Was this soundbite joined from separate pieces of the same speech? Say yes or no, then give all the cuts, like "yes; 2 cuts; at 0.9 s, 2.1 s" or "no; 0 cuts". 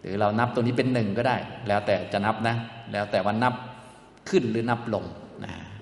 no; 0 cuts